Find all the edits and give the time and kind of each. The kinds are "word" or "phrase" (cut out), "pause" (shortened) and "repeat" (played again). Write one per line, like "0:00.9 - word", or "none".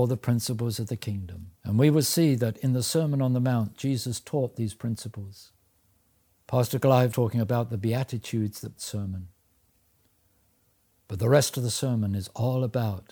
0:01.6 - pause
0:05.7 - pause
0:07.1 - word
0:08.8 - phrase